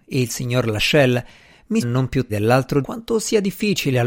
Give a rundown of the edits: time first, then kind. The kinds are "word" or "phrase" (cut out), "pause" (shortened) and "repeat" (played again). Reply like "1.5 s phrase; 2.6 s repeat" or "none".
1.8 s word; 2.3 s word; 2.8 s word